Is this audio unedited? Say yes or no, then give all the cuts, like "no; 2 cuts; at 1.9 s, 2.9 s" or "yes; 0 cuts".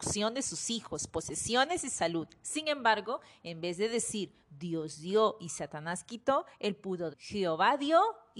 no; 2 cuts; at 4.4 s, 7.1 s